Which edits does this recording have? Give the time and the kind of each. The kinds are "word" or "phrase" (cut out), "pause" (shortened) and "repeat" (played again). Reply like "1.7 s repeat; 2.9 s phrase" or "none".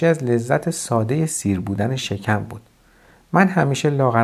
none